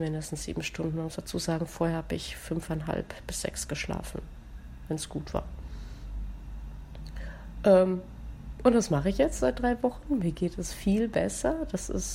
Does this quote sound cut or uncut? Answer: uncut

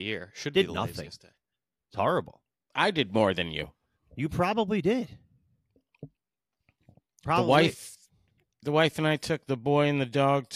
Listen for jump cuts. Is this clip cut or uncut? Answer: uncut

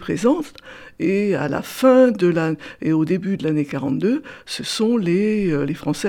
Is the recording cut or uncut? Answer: uncut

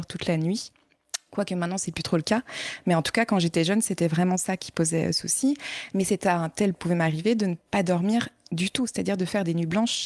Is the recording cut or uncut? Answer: cut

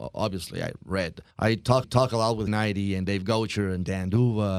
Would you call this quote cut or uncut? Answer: cut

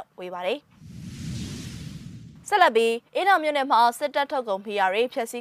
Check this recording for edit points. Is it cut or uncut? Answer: cut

